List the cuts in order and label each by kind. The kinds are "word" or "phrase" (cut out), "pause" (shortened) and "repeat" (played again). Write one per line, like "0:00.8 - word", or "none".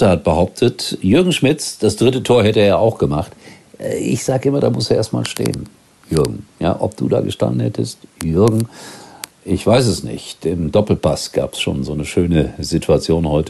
none